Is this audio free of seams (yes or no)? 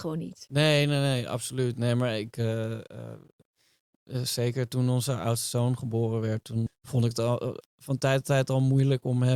no